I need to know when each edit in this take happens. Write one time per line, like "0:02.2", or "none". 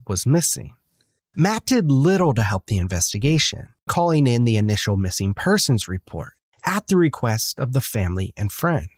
0:03.9